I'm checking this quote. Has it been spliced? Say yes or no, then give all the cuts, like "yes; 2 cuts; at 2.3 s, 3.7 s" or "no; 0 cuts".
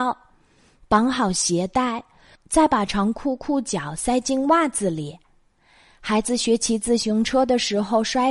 no; 0 cuts